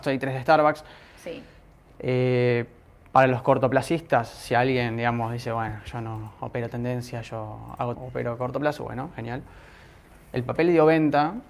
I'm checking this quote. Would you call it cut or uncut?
cut